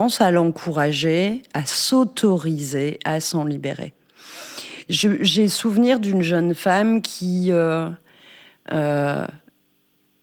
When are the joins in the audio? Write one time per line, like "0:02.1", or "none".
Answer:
none